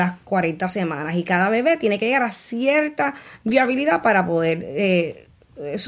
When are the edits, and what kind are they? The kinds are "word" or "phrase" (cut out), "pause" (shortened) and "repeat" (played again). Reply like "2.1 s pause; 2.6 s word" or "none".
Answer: none